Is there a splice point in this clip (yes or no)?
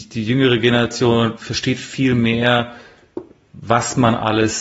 no